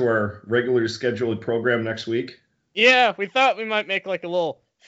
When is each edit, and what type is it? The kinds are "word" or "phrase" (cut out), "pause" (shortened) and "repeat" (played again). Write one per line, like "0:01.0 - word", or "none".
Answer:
none